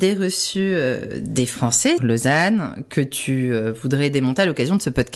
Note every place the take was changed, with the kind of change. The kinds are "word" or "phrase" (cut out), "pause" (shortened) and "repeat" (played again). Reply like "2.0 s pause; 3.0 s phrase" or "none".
2.0 s word